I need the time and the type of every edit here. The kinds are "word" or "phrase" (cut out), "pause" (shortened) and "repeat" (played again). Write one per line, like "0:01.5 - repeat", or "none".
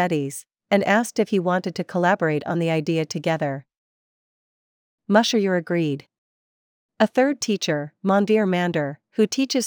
none

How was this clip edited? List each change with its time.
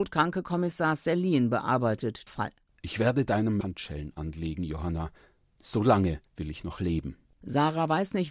0:02.3 - phrase
0:03.6 - word
0:06.3 - pause

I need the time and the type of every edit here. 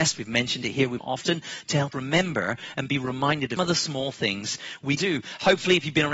0:01.0 - phrase
0:01.9 - word
0:03.6 - word
0:05.0 - word

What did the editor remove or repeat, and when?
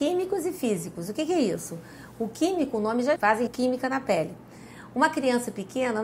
0:03.2 - phrase
0:03.5 - word

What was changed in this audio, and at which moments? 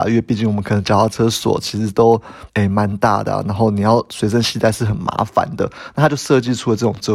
0:02.5 - pause

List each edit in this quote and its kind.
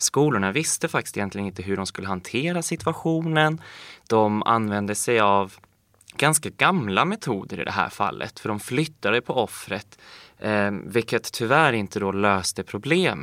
none

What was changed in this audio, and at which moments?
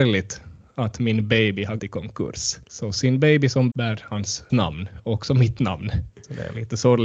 0:01.8 - word
0:02.6 - pause
0:03.7 - word
0:04.5 - word
0:06.1 - pause

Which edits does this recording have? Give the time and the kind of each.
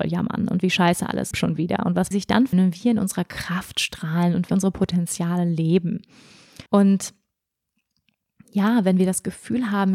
0:01.3 - phrase
0:02.1 - phrase
0:02.5 - phrase
0:04.5 - word
0:06.7 - pause

